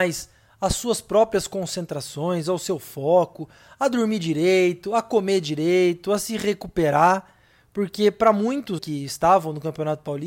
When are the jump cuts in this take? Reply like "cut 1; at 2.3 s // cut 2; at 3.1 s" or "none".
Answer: cut 1; at 8.8 s

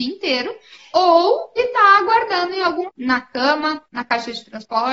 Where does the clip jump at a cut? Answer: cut 1; at 0.9 s // cut 2; at 1.6 s // cut 3; at 2.9 s

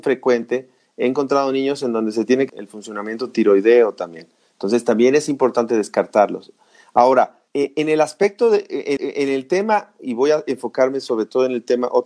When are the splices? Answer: cut 1; at 2.5 s // cut 2; at 7.5 s // cut 3; at 9.0 s

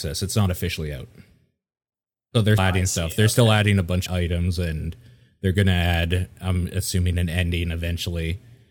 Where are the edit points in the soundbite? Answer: cut 1; at 2.6 s // cut 2; at 4.1 s

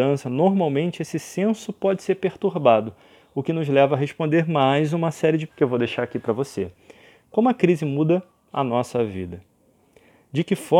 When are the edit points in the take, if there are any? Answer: cut 1; at 5.5 s

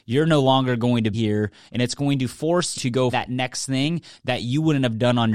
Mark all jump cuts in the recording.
cut 1; at 1.1 s // cut 2; at 2.7 s // cut 3; at 3.1 s

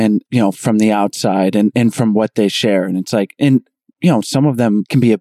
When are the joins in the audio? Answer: none

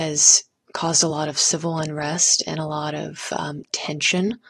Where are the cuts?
none

